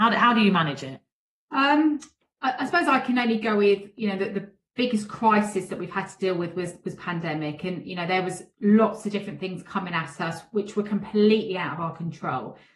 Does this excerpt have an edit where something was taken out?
no; 0 cuts

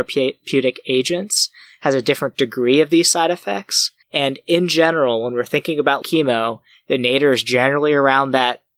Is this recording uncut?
no; 2 cuts; at 4.0 s, 6.0 s

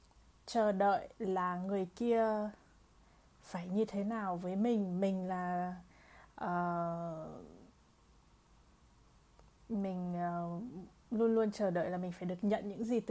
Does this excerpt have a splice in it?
no; 0 cuts

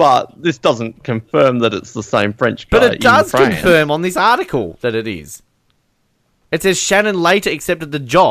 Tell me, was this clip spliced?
no; 0 cuts

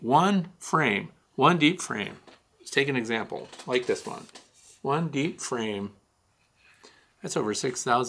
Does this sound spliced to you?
no; 0 cuts

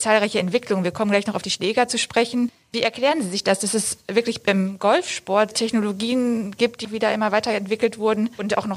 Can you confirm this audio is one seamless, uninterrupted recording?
no; 1 cut; at 6.8 s

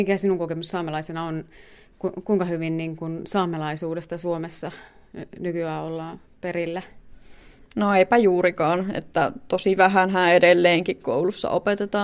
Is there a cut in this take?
no; 0 cuts

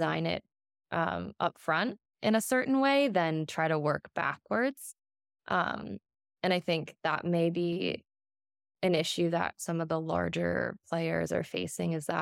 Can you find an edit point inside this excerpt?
no; 0 cuts

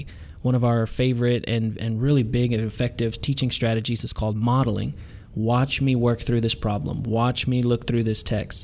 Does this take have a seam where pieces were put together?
no; 0 cuts

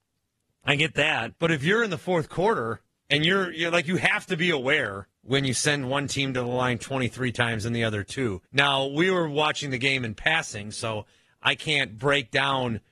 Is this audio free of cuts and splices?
no; 4 cuts; at 1.4 s, 2.9 s, 5.2 s, 8.5 s

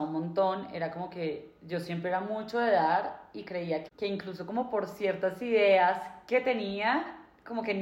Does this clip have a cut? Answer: yes; 1 cut; at 3.9 s

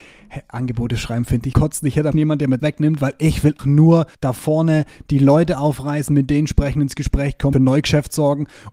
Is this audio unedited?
no; 6 cuts; at 1.5 s, 2.1 s, 2.6 s, 3.6 s, 4.1 s, 7.5 s

